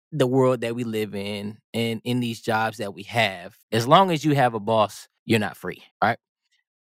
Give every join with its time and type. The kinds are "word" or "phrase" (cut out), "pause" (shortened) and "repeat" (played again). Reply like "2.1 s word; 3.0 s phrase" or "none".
3.6 s pause; 5.2 s pause; 5.9 s pause